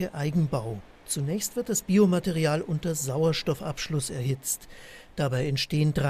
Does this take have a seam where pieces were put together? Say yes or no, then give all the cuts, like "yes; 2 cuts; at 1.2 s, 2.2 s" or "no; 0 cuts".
no; 0 cuts